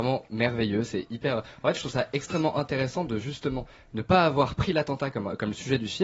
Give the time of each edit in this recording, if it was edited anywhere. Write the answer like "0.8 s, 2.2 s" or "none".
none